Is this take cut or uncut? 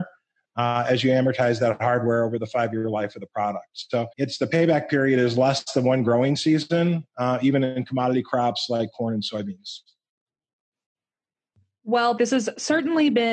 cut